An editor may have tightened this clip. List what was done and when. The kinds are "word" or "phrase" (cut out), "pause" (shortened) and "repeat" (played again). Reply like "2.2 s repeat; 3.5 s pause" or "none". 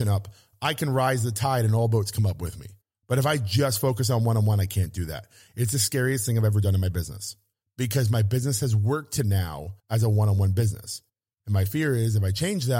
2.8 s pause; 7.5 s pause; 9.8 s pause; 11.1 s pause

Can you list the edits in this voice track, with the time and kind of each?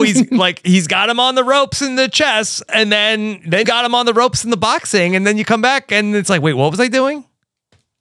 3.6 s word

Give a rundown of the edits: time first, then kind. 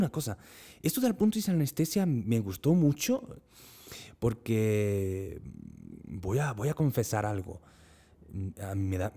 none

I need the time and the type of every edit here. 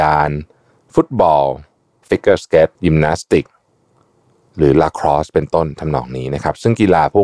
2.7 s pause

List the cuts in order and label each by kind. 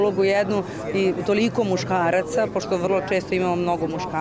none

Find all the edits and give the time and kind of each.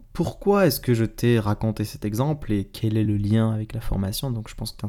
none

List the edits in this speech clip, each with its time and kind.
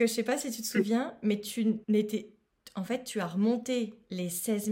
1.8 s pause

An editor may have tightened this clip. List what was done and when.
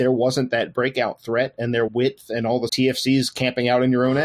1.9 s phrase; 2.7 s phrase

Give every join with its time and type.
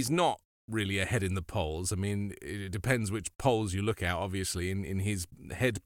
none

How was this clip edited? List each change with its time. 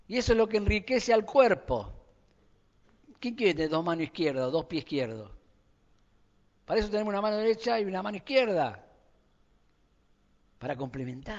none

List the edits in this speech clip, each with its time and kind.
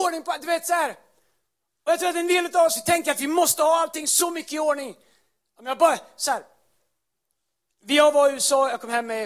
none

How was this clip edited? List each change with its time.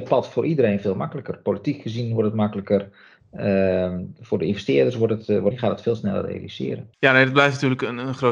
5.5 s phrase; 6.9 s pause

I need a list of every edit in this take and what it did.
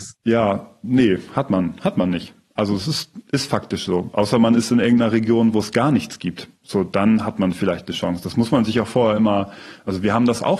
none

